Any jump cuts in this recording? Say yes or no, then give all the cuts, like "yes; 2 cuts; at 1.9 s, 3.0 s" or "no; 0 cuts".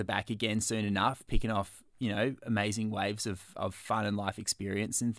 no; 0 cuts